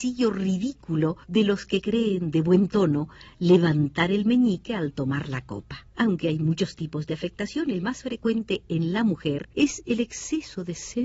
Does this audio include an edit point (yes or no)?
yes